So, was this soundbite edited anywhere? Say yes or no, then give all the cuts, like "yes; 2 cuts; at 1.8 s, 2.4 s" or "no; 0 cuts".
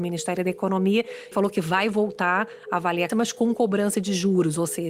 yes; 2 cuts; at 1.3 s, 3.1 s